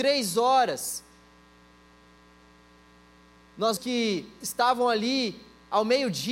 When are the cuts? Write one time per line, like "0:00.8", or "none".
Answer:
0:03.8
0:04.4